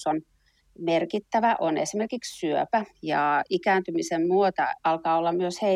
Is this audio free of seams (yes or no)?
no